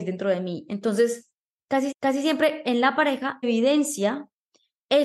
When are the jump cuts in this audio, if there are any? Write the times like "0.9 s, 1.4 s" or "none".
1.9 s, 3.4 s